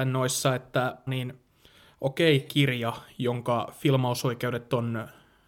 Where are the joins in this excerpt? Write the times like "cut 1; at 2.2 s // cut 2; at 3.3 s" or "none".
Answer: cut 1; at 1.1 s // cut 2; at 2.5 s